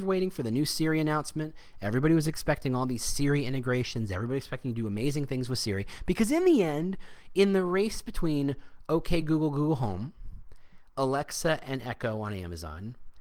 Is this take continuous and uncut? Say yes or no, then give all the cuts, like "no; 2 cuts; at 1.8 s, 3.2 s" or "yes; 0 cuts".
yes; 0 cuts